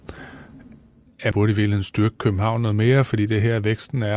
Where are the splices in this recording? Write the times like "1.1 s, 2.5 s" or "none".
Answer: 1.3 s